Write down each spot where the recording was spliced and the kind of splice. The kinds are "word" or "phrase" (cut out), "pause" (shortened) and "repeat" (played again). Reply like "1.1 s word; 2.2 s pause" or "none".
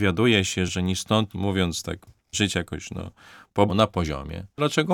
1.3 s phrase; 2.3 s word; 3.7 s word